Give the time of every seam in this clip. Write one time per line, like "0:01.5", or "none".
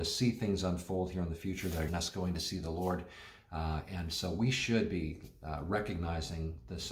0:01.9

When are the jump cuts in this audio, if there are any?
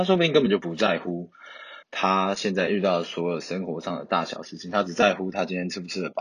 0:01.8

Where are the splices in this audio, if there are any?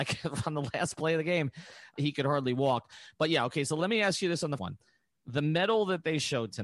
0:02.0
0:04.6

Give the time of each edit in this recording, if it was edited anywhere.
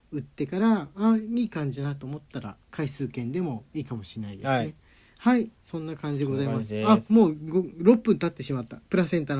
0:02.6

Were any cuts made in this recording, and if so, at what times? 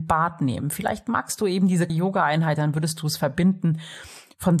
0:01.9

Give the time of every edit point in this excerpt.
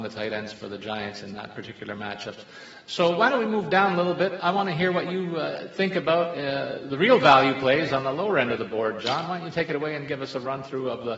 none

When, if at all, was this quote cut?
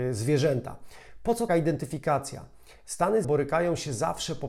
0:01.5
0:03.2

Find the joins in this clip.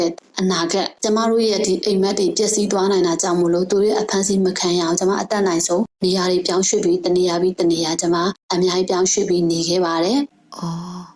none

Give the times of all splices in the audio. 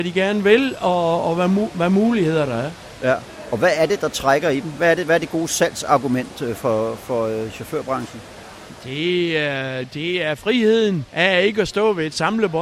0:11.1

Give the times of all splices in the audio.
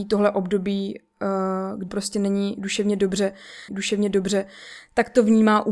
0:01.9
0:03.7

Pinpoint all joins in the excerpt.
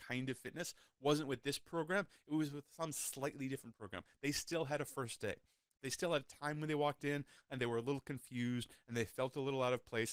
none

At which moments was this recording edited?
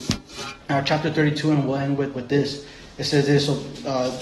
0:02.1

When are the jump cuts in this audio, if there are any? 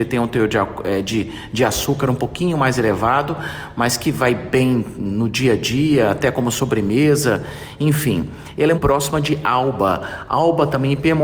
0:08.7

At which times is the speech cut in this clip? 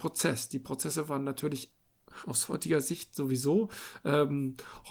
none

